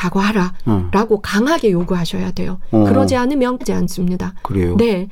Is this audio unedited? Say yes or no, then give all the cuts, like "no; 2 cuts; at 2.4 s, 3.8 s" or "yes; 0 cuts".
no; 1 cut; at 3.6 s